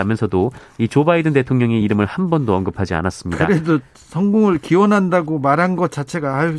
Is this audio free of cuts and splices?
yes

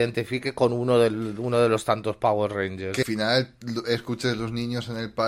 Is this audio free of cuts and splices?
no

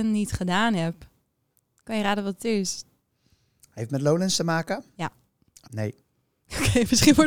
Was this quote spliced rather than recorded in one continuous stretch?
yes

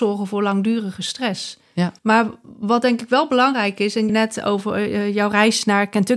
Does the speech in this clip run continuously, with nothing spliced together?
no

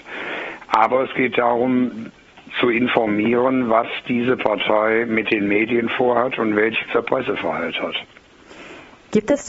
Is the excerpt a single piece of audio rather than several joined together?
no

